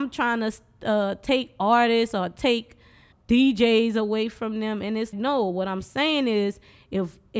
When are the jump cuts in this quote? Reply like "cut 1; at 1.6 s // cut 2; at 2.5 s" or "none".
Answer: cut 1; at 3.1 s // cut 2; at 5.1 s